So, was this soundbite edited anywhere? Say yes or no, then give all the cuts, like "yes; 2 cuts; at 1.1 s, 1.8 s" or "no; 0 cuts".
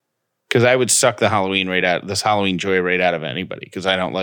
no; 0 cuts